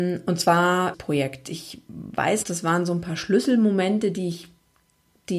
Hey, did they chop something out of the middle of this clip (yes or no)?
yes